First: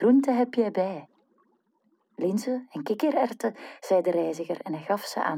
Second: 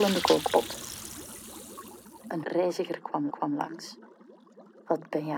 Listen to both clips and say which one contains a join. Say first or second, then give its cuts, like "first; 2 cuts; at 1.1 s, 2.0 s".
second; 2 cuts; at 2.4 s, 3.3 s